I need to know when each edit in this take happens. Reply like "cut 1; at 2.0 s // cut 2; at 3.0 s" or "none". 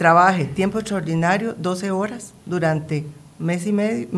cut 1; at 2.4 s

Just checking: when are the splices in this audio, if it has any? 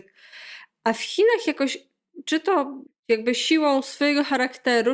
cut 1; at 2.9 s

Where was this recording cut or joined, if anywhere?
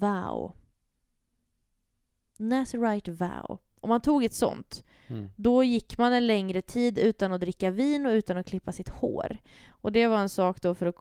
none

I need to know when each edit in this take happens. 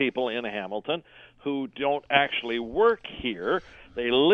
none

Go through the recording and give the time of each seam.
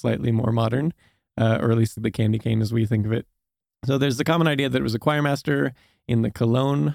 cut 1; at 2.0 s

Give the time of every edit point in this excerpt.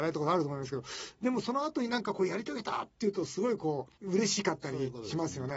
cut 1; at 4.0 s

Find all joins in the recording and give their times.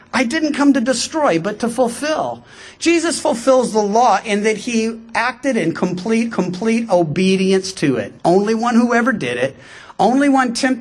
cut 1; at 6.3 s // cut 2; at 8.2 s

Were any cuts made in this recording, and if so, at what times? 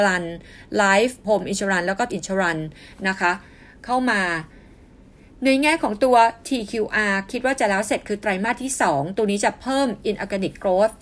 cut 1; at 1.2 s // cut 2; at 2.1 s // cut 3; at 6.4 s

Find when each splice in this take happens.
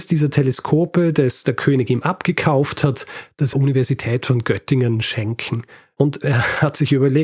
cut 1; at 3.5 s

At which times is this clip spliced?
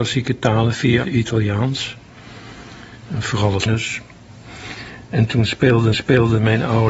cut 1; at 1.0 s // cut 2; at 3.7 s // cut 3; at 5.9 s

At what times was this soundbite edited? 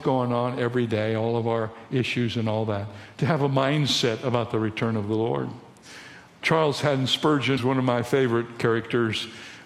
cut 1; at 7.6 s

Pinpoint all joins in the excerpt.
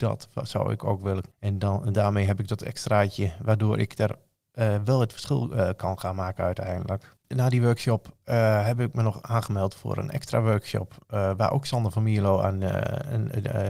cut 1; at 7.2 s

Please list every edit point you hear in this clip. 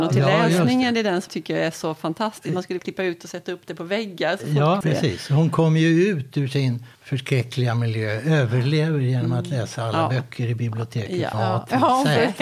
cut 1; at 1.3 s // cut 2; at 2.8 s // cut 3; at 4.8 s // cut 4; at 6.9 s // cut 5; at 11.3 s

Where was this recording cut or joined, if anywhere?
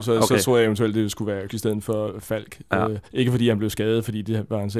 cut 1; at 1.5 s // cut 2; at 3.1 s

